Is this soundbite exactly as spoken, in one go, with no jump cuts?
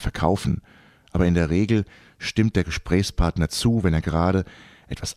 yes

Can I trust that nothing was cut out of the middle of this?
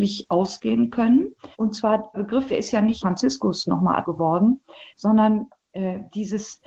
no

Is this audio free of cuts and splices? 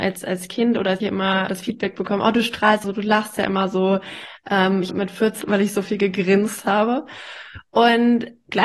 no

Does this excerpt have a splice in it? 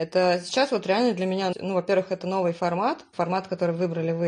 yes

